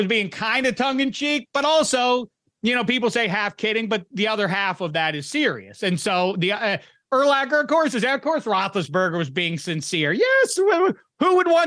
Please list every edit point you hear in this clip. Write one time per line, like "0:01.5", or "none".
none

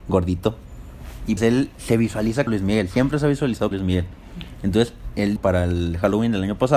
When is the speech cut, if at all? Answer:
0:01.4
0:02.5
0:03.7
0:05.4

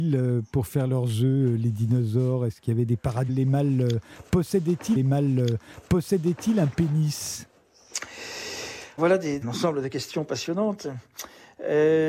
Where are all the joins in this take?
0:03.3
0:05.0
0:09.0
0:09.4

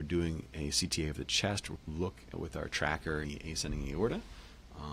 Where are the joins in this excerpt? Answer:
0:01.8
0:02.3
0:03.2

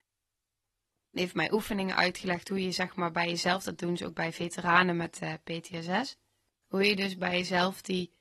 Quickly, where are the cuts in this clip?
none

